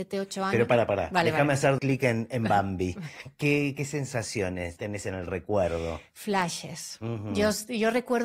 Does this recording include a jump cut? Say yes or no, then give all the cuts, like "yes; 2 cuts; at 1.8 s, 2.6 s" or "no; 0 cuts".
yes; 1 cut; at 1.8 s